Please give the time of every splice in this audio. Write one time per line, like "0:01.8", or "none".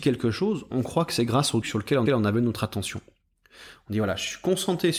0:01.6
0:02.1